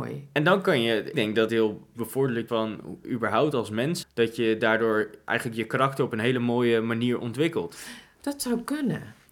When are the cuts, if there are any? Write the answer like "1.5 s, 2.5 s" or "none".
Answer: 1.1 s, 1.5 s, 1.9 s, 2.5 s, 3.0 s, 4.0 s